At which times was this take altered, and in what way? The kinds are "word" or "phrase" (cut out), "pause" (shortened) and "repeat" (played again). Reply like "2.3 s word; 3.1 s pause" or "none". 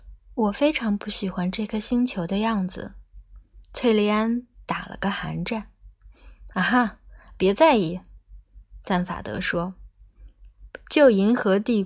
3.6 s pause